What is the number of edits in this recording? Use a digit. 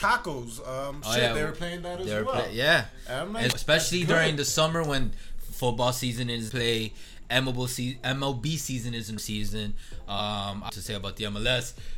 4